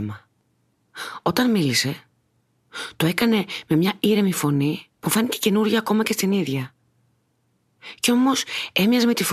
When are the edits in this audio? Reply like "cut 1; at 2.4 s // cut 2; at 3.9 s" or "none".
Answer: cut 1; at 4.9 s